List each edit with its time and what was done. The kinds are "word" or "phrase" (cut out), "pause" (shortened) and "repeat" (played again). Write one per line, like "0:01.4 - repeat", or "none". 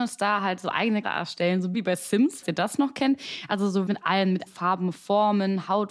0:01.0 - word
0:01.7 - word
0:02.4 - word
0:03.9 - word
0:04.5 - word